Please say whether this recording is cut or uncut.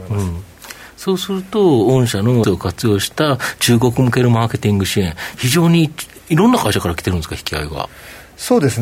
cut